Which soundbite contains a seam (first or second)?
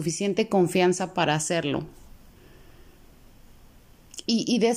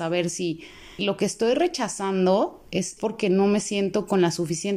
second